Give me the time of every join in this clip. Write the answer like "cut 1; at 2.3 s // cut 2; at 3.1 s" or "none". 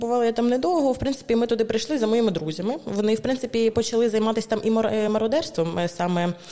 none

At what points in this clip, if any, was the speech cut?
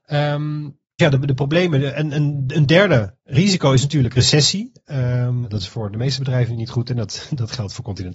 cut 1; at 1.0 s // cut 2; at 5.4 s

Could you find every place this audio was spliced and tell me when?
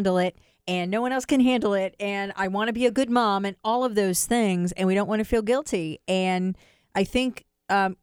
none

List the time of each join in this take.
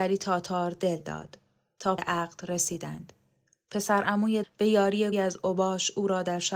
cut 1; at 2.0 s // cut 2; at 4.4 s // cut 3; at 5.1 s

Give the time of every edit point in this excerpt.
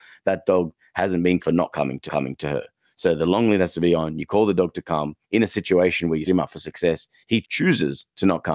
cut 1; at 1.4 s // cut 2; at 2.1 s // cut 3; at 5.2 s // cut 4; at 6.3 s // cut 5; at 7.4 s

